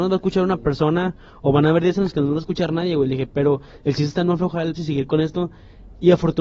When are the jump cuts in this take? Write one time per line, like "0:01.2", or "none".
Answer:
0:04.7